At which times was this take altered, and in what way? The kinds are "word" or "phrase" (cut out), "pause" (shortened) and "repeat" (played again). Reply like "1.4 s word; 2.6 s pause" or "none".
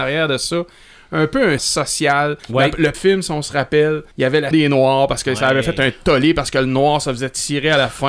1.6 s word; 2.4 s pause; 2.9 s word; 4.1 s pause; 4.5 s word